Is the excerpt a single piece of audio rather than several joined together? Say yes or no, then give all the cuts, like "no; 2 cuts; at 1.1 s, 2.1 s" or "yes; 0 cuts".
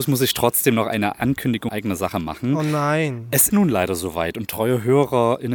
no; 2 cuts; at 1.7 s, 3.5 s